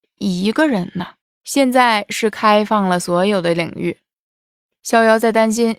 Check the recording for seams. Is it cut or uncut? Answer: cut